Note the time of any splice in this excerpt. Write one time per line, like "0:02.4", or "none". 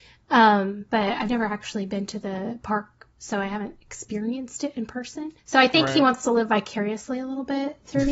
0:05.4